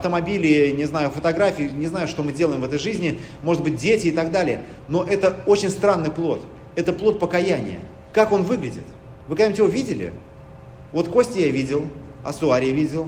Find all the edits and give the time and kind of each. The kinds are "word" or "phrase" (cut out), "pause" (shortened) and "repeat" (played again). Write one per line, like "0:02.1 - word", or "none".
none